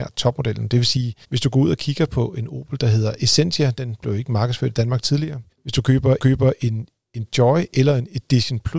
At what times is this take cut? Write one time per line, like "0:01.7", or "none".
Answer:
0:01.2
0:05.5
0:06.2